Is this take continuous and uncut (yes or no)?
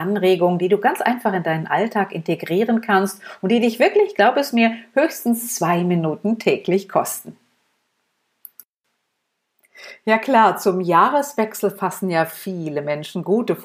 yes